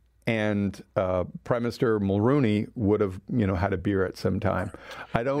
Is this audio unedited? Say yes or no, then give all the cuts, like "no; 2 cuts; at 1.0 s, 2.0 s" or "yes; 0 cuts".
yes; 0 cuts